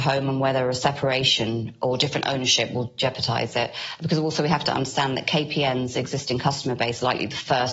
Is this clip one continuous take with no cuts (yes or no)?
yes